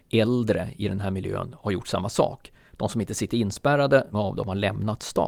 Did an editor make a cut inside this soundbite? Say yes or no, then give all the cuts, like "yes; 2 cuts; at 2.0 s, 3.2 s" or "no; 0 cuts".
yes; 1 cut; at 4.1 s